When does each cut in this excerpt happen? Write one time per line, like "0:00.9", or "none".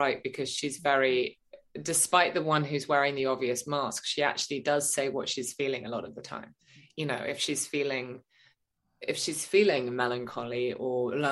none